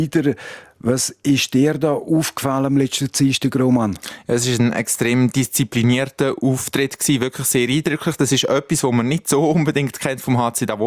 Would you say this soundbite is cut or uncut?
uncut